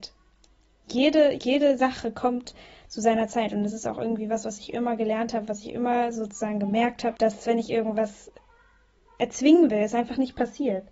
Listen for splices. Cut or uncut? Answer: cut